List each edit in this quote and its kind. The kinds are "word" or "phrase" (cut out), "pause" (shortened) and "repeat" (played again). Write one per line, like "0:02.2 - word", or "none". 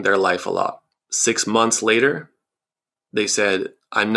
none